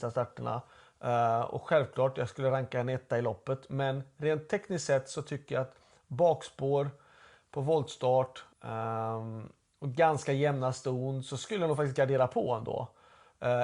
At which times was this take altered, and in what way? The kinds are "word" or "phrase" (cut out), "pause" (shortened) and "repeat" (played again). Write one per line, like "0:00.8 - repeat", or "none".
0:08.5 - pause